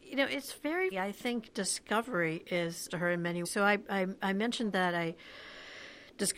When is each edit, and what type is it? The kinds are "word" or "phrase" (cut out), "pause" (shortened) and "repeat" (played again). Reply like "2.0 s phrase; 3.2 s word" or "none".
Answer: 0.9 s word; 2.9 s word; 3.4 s word